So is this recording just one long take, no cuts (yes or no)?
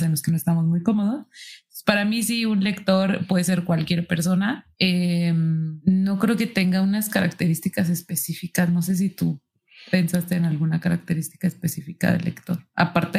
yes